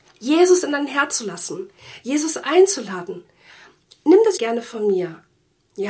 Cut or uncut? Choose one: cut